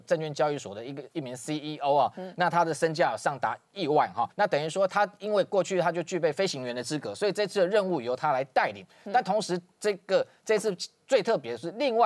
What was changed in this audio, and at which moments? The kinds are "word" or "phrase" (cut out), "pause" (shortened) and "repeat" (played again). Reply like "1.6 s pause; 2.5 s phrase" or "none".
4.3 s pause